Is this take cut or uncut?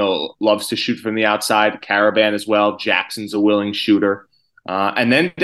uncut